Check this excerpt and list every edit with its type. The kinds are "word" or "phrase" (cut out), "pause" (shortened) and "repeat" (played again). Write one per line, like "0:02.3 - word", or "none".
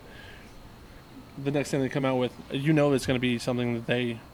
none